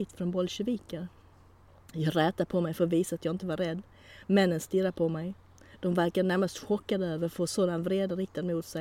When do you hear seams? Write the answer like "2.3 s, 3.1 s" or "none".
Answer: none